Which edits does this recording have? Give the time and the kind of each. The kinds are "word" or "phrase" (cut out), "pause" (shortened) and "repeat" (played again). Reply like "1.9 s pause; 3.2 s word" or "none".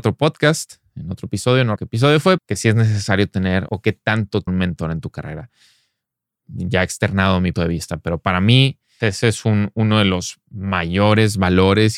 1.8 s word; 2.4 s word; 3.7 s word; 4.5 s word; 7.5 s word; 9.0 s word